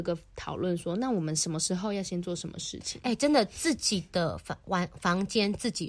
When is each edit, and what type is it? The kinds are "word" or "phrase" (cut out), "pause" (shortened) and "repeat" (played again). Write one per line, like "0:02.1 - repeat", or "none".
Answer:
none